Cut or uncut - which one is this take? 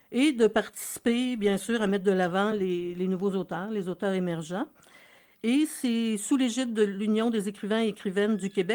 uncut